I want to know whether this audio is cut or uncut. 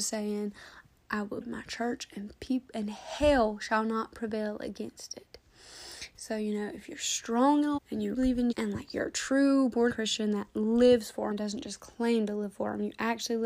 cut